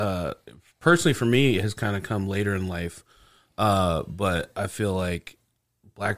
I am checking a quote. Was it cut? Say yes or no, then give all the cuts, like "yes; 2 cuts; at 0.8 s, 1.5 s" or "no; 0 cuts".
no; 0 cuts